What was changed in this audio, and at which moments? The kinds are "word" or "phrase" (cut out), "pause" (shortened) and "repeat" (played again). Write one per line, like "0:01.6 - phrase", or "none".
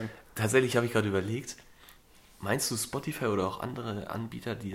none